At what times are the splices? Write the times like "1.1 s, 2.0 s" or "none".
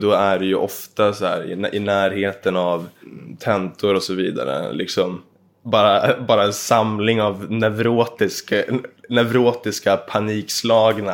5.3 s, 9.0 s